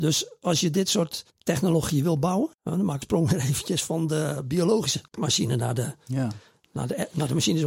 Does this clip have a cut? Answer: yes; 4 cuts; at 1.3 s, 2.5 s, 3.0 s, 5.1 s

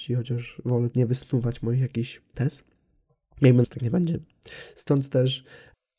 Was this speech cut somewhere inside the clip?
yes; 3 cuts; at 0.9 s, 2.3 s, 3.6 s

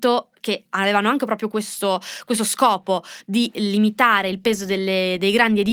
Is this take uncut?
yes; 0 cuts

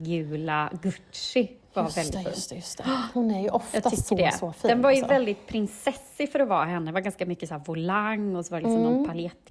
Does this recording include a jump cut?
no; 0 cuts

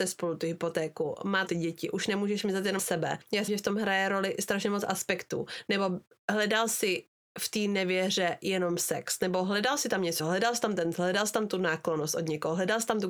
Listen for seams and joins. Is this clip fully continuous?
no; 5 cuts; at 1.5 s, 2.8 s, 3.5 s, 10.2 s, 10.9 s

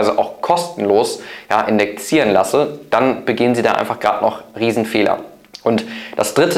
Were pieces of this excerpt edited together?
no; 0 cuts

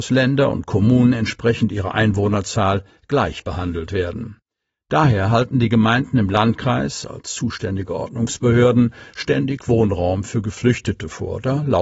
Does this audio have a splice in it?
no; 0 cuts

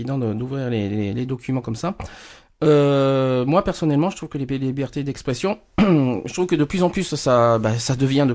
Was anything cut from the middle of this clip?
no; 0 cuts

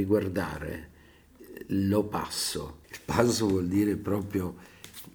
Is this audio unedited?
no; 1 cut; at 2.8 s

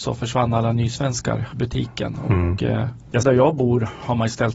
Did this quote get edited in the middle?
yes; 2 cuts; at 1.5 s, 3.2 s

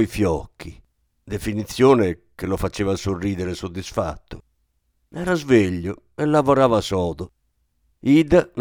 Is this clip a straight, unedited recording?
yes; 0 cuts

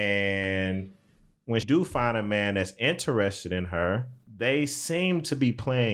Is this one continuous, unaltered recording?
no; 1 cut; at 1.6 s

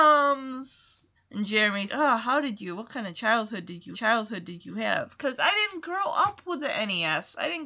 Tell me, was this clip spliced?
yes; 3 cuts; at 1.2 s, 1.9 s, 3.9 s

